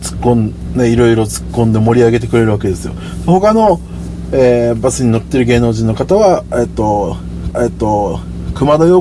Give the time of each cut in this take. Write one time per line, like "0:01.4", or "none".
0:07.5